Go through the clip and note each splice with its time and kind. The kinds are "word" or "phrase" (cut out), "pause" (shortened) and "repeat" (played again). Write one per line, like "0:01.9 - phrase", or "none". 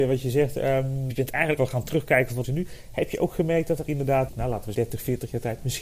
0:01.1 - word
0:01.6 - word
0:02.4 - word
0:03.9 - word
0:04.3 - word
0:04.7 - word